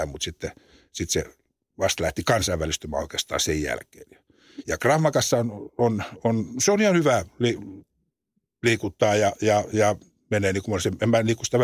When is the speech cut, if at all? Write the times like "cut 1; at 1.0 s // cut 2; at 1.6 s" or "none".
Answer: none